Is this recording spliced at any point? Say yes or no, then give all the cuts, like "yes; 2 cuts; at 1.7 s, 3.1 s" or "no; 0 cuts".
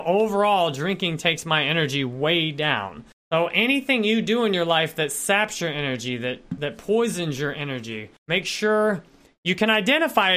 yes; 2 cuts; at 3.1 s, 8.2 s